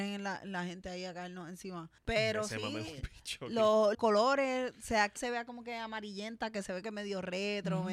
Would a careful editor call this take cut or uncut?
cut